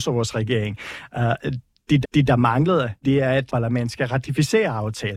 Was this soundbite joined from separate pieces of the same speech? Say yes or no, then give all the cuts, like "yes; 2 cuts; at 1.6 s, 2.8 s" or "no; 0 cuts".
yes; 3 cuts; at 2.0 s, 3.0 s, 3.5 s